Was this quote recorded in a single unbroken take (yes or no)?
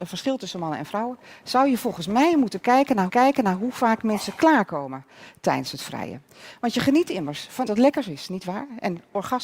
no